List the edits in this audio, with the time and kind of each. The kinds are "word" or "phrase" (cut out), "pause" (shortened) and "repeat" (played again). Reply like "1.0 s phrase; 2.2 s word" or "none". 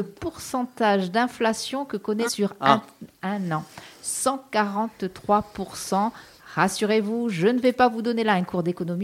2.3 s word